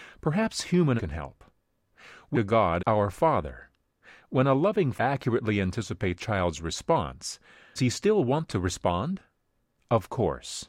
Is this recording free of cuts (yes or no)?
no